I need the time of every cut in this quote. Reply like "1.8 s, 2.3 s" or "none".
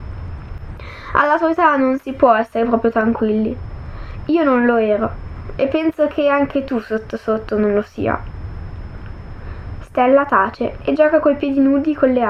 none